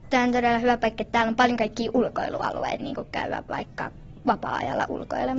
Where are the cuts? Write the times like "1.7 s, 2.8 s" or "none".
2.8 s